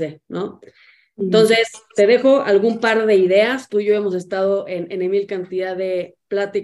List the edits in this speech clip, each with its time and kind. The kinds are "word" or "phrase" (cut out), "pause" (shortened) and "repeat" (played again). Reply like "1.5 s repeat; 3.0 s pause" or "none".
none